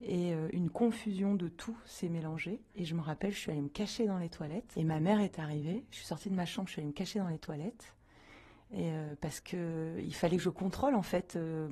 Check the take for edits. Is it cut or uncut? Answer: uncut